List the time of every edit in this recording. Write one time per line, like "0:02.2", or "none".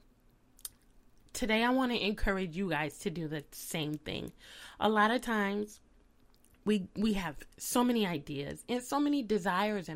none